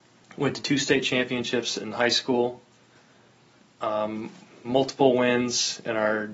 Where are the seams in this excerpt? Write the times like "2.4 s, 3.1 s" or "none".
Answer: none